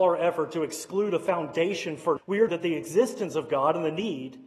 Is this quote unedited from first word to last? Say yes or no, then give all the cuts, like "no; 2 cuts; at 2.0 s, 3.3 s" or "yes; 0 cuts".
no; 2 cuts; at 2.2 s, 2.5 s